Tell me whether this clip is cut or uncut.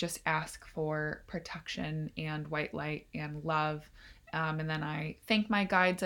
uncut